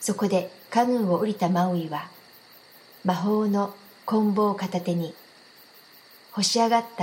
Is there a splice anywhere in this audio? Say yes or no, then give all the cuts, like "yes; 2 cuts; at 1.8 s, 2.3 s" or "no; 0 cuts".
no; 0 cuts